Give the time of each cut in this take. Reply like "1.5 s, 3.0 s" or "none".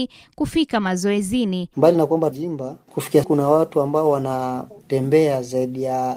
2.3 s, 3.2 s

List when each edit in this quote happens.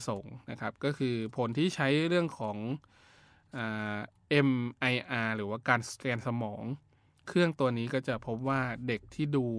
none

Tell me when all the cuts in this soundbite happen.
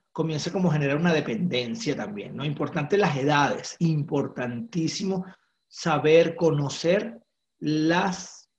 none

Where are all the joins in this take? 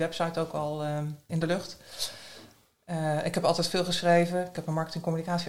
none

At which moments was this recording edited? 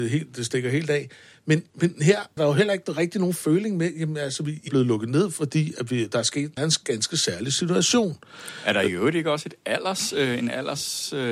1.7 s, 2.4 s, 4.7 s, 6.6 s

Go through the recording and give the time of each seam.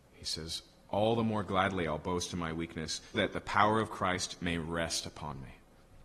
3.1 s

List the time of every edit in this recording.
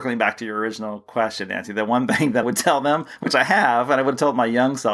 2.4 s

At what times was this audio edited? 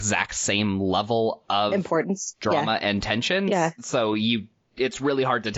none

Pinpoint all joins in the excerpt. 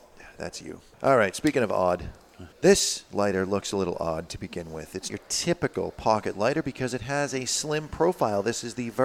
0.9 s, 2.5 s, 5.1 s

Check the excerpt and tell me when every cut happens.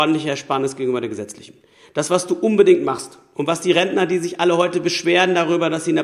none

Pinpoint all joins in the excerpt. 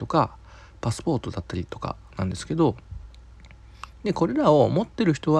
none

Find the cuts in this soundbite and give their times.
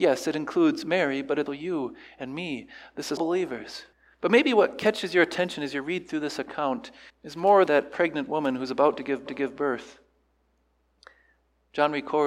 1.5 s, 3.2 s, 3.9 s, 7.1 s, 7.7 s, 9.3 s

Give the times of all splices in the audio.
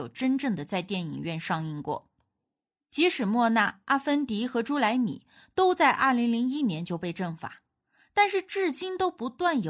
none

